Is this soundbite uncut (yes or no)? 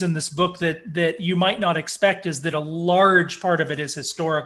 yes